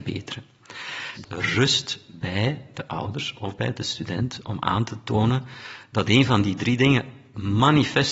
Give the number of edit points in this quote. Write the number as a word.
one